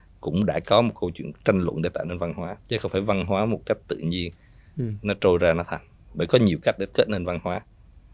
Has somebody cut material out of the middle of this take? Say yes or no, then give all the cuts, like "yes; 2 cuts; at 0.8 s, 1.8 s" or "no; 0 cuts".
yes; 2 cuts; at 2.6 s, 6.9 s